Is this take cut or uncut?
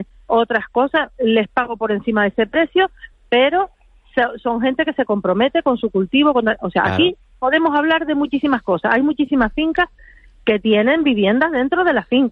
uncut